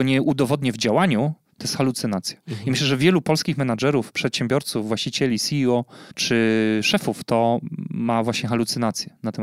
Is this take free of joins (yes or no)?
no